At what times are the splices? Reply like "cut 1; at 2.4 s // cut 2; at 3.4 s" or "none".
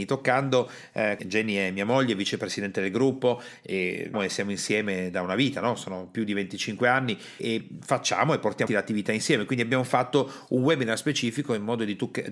cut 1; at 1.2 s // cut 2; at 4.1 s // cut 3; at 7.4 s // cut 4; at 8.7 s